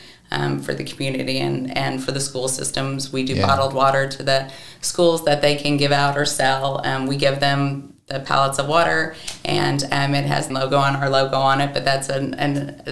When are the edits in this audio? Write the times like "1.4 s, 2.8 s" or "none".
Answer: 10.5 s